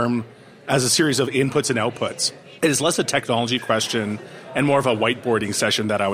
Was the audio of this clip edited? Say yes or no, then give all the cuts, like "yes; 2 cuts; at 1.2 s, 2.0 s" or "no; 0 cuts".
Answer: no; 0 cuts